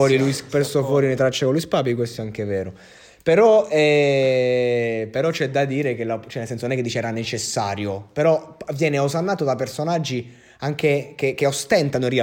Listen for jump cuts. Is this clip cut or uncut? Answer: uncut